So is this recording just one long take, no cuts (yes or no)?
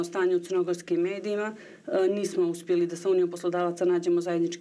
yes